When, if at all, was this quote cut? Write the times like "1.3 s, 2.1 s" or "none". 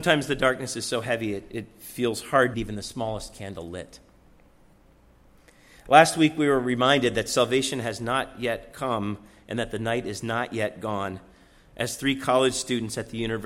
2.5 s